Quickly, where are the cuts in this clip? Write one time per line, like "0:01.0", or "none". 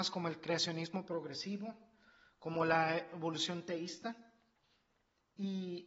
none